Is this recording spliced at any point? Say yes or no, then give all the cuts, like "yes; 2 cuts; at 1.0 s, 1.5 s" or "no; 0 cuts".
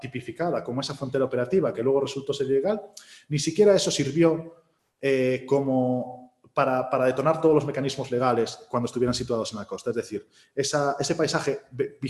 no; 0 cuts